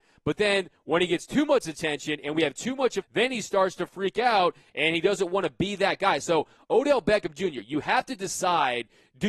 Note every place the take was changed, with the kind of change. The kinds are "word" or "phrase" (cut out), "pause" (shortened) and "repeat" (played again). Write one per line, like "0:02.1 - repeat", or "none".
0:03.0 - phrase